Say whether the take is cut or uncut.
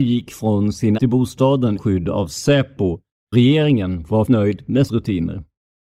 cut